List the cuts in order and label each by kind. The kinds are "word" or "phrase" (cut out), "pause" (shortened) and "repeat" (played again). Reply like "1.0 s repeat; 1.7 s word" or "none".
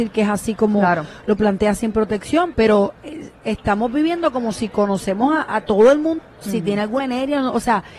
2.5 s word; 5.5 s word; 6.2 s phrase; 7.0 s word